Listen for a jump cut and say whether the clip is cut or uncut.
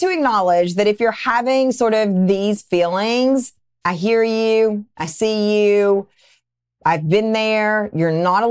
uncut